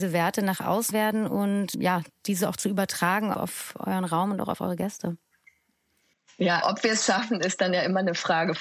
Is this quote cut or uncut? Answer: cut